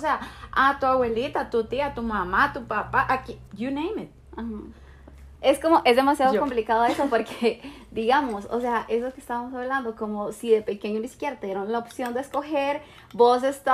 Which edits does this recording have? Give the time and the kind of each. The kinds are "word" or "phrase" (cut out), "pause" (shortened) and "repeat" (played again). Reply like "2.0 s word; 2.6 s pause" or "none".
3.5 s pause; 5.3 s pause